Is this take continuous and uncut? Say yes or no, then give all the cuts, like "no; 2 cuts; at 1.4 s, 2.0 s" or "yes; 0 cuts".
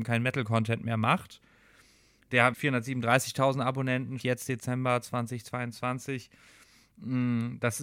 no; 2 cuts; at 2.5 s, 4.2 s